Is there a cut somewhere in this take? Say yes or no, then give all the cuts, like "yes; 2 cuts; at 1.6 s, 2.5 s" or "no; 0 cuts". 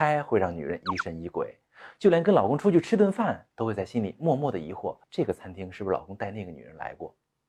yes; 1 cut; at 5.0 s